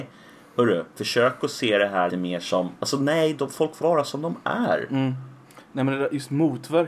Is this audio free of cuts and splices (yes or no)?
no